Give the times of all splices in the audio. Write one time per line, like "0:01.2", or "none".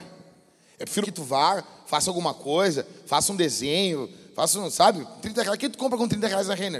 0:01.0